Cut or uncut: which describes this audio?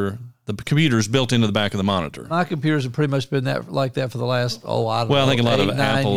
uncut